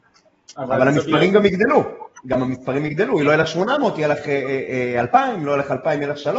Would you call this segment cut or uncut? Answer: uncut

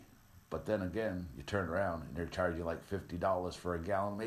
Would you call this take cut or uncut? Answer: uncut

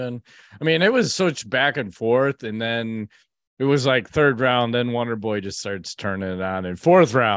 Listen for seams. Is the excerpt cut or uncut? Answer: uncut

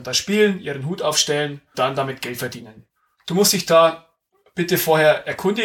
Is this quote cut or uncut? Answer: cut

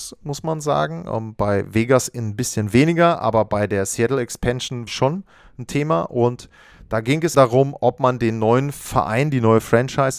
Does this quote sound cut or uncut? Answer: cut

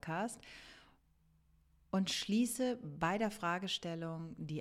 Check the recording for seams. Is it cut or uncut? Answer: uncut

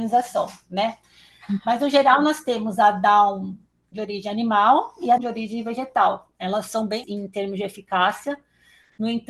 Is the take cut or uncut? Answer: cut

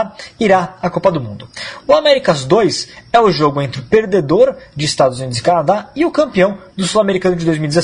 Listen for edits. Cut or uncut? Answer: uncut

